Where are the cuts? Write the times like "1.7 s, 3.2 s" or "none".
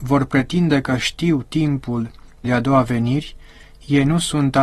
2.4 s